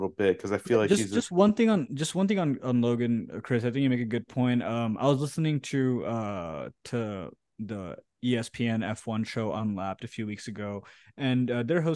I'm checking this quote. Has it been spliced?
no; 0 cuts

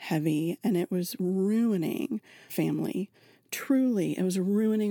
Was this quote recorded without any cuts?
no; 1 cut; at 2.5 s

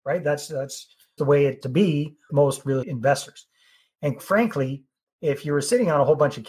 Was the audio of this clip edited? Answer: yes; 5 cuts; at 1.2 s, 1.6 s, 2.3 s, 2.8 s, 4.2 s

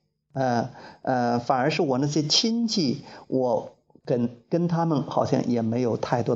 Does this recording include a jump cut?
no; 0 cuts

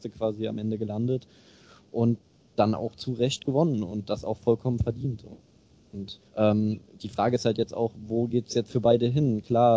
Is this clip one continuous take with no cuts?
no; 2 cuts; at 2.3 s, 6.3 s

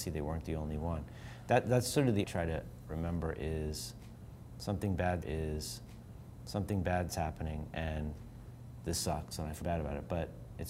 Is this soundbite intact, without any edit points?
no; 3 cuts; at 2.2 s, 5.2 s, 9.6 s

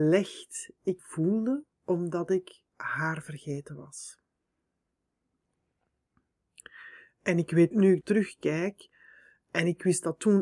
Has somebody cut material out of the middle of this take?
yes; 5 cuts; at 1.0 s, 1.7 s, 2.7 s, 7.7 s, 8.0 s

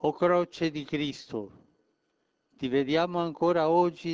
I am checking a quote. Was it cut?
no; 0 cuts

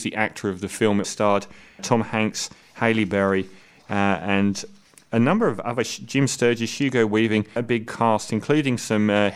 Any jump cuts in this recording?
yes; 3 cuts; at 1.0 s, 1.8 s, 7.6 s

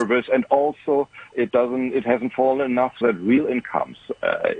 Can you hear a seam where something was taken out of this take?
yes; 2 cuts; at 1.3 s, 3.0 s

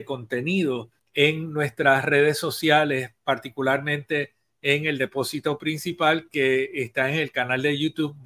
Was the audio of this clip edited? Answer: yes; 1 cut; at 1.0 s

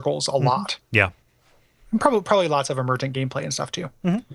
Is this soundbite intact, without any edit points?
yes; 0 cuts

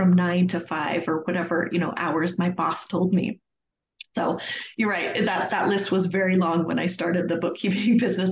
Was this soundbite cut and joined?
no; 0 cuts

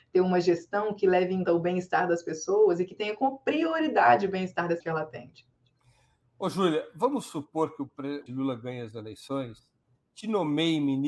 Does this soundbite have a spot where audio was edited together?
yes; 3 cuts; at 1.5 s, 4.8 s, 8.3 s

